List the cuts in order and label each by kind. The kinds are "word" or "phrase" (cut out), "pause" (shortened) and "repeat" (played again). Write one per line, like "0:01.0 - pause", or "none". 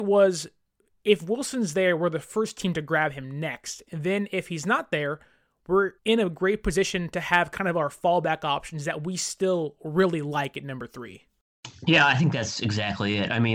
0:06.0 - pause